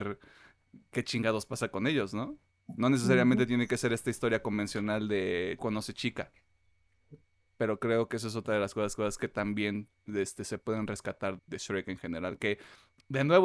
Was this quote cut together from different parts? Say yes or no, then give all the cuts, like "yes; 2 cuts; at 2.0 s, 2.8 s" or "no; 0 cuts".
yes; 4 cuts; at 5.6 s, 7.3 s, 9.0 s, 11.4 s